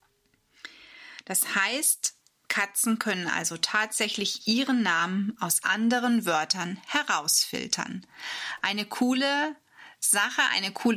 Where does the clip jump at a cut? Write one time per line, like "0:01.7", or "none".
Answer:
none